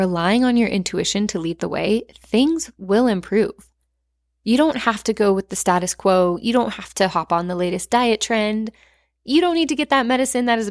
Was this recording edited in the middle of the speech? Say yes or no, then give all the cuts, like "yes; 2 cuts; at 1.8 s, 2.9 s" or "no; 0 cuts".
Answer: no; 0 cuts